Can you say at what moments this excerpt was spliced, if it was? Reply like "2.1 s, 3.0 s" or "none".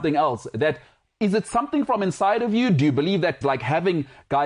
3.4 s

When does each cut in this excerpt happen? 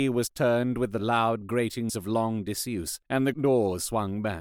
1.9 s, 3.0 s, 3.3 s

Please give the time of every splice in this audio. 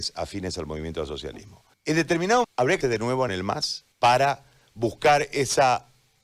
1.7 s, 2.4 s, 2.8 s, 3.3 s, 3.9 s

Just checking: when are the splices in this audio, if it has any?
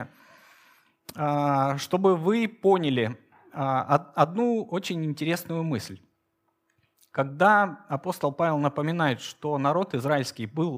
none

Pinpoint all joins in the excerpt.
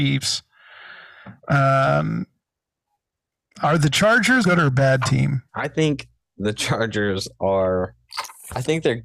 1.4 s, 4.4 s, 5.5 s

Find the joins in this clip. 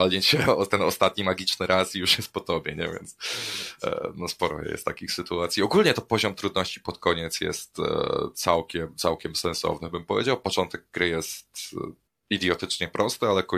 none

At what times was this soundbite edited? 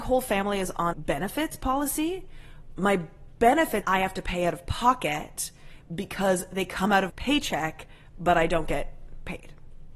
0.9 s, 3.8 s, 7.1 s

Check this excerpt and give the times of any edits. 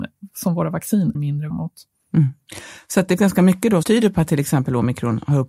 1.1 s, 1.5 s, 3.2 s, 3.8 s

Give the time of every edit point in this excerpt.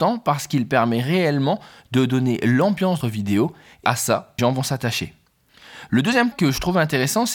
3.0 s, 3.8 s, 4.4 s, 6.3 s

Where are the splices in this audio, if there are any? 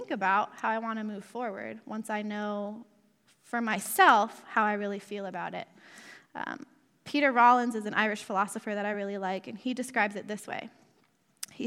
none

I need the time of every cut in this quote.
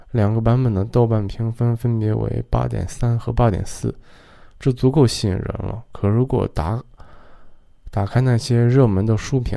none

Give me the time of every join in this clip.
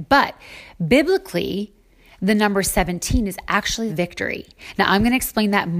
3.9 s

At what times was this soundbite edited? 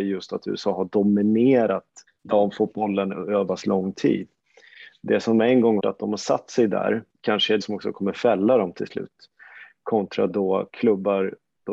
2.1 s, 3.5 s, 5.8 s, 7.1 s, 7.6 s, 10.3 s

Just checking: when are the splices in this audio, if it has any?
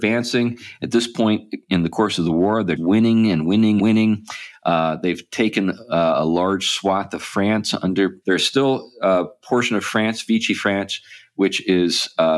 2.8 s, 3.8 s, 8.2 s

